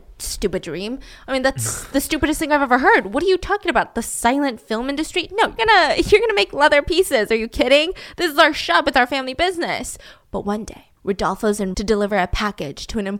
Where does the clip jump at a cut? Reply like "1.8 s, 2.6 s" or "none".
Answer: 5.6 s, 11.0 s, 11.7 s